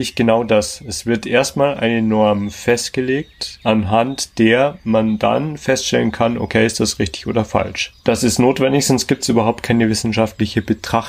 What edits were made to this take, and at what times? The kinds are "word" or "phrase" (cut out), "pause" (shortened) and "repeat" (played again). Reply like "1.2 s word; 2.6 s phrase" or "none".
8.0 s pause

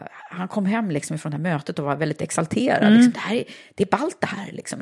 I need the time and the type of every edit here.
none

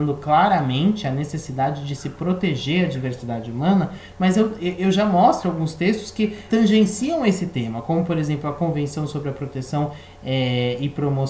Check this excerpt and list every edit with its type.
6.5 s word

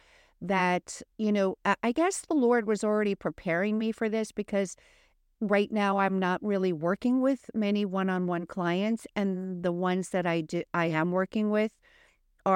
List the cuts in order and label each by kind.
1.1 s pause

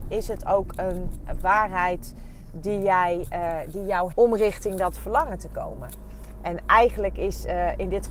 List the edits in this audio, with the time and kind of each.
4.1 s word

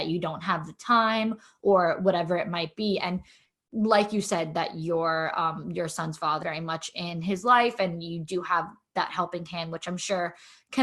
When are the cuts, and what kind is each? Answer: 6.4 s word

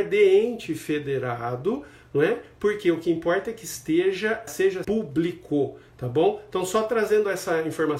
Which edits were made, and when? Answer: 4.5 s word; 4.8 s word

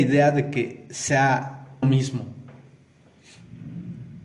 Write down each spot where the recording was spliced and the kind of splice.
1.8 s word

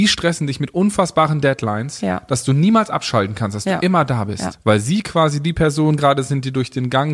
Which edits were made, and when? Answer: none

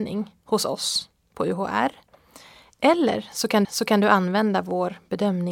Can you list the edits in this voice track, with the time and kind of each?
3.6 s repeat

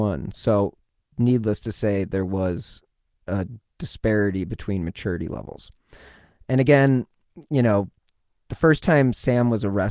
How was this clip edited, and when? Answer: none

